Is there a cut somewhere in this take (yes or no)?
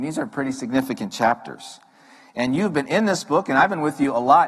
no